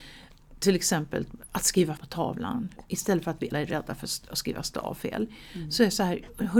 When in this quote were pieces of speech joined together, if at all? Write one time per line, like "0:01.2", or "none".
0:02.0
0:03.5